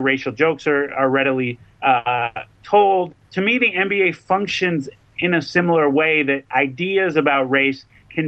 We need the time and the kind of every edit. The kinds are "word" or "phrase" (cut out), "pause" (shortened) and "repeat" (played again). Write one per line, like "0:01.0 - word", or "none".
0:03.2 - pause